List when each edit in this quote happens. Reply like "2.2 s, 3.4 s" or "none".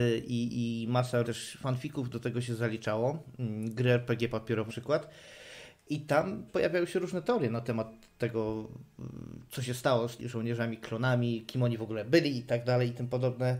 1.2 s, 4.7 s, 6.5 s, 10.2 s